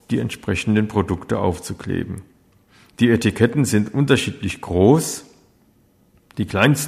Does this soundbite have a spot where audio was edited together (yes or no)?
no